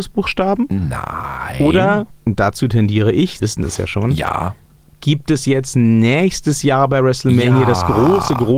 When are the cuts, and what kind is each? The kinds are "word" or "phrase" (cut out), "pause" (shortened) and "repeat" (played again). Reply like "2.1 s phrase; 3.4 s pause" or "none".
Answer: 2.1 s pause; 3.4 s word; 4.7 s pause